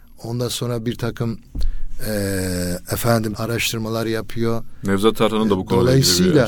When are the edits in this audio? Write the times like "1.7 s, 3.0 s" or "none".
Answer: 3.3 s